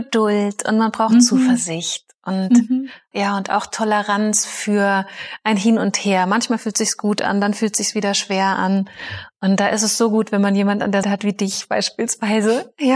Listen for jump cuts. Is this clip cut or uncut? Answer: cut